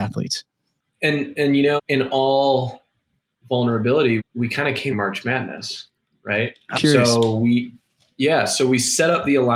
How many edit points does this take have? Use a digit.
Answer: 4